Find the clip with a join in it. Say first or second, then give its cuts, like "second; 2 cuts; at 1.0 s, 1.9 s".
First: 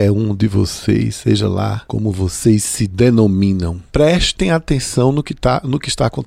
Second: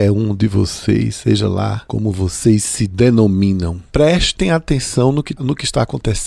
second; 1 cut; at 5.4 s